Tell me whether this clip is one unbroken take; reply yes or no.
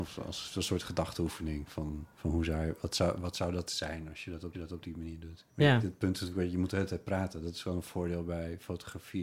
no